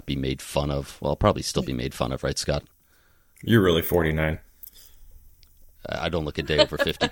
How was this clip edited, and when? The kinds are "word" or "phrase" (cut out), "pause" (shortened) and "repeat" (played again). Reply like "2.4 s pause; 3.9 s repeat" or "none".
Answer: none